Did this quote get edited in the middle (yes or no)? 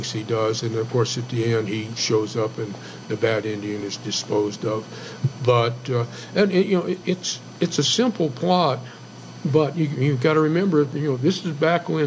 no